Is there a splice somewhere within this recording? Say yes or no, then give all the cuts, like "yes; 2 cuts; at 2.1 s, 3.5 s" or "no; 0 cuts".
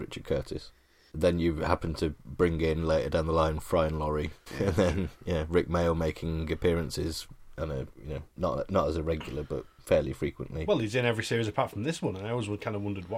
yes; 1 cut; at 8.3 s